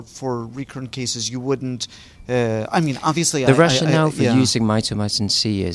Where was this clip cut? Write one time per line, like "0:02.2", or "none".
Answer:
none